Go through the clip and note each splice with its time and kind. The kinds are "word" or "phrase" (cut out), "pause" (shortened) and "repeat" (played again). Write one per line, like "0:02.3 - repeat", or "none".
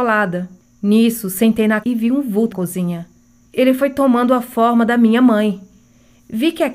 0:01.8 - word
0:02.5 - word

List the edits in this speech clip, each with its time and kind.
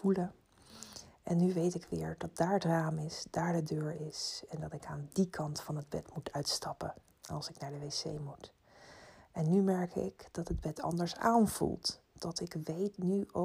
none

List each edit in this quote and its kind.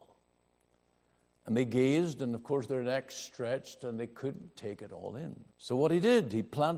0:05.5 - pause

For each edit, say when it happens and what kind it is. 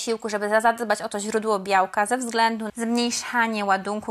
0:02.7 - word

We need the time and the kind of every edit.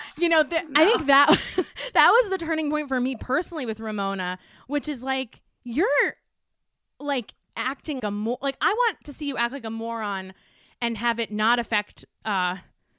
0:08.0 - word

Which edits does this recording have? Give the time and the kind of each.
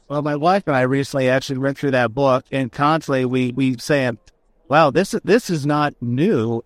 0:03.8 - word

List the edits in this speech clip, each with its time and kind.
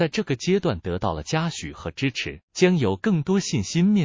0:02.5 - pause

